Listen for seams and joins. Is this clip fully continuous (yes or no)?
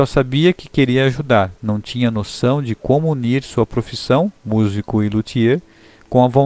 no